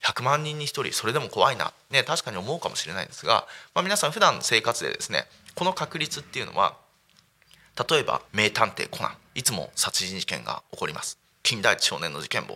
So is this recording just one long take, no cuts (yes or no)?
no